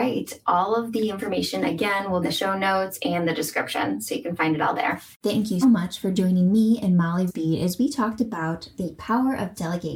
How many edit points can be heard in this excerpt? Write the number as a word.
four